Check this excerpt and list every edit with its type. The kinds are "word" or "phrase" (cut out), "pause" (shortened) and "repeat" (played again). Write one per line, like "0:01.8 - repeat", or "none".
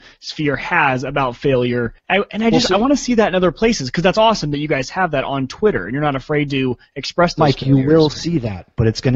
0:02.0 - pause